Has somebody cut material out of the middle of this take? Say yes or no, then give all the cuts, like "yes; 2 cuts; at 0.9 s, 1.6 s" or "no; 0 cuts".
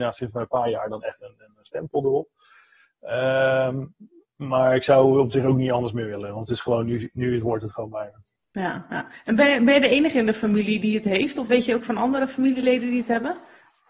no; 0 cuts